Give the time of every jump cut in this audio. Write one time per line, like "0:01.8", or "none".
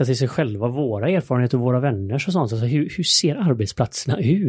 none